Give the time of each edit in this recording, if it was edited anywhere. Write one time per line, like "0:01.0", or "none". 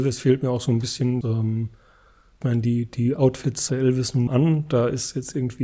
0:01.2
0:02.4
0:03.7
0:04.3